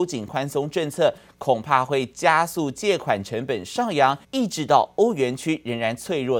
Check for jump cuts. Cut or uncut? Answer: cut